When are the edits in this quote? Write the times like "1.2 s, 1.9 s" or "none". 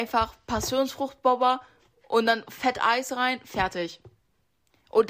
none

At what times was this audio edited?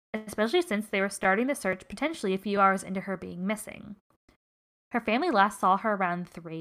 none

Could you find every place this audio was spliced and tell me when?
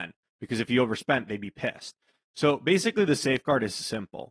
none

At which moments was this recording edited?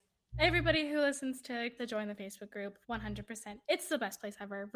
1.8 s, 2.8 s

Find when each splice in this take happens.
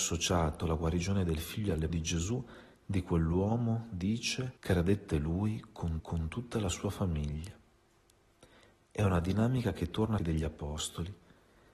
1.9 s, 4.6 s, 6.0 s, 10.2 s

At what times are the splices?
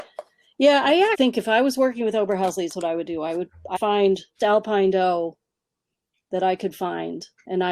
1.1 s, 2.7 s, 3.8 s, 4.4 s

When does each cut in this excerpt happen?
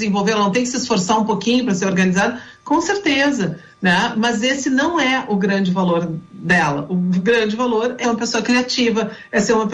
8.0 s

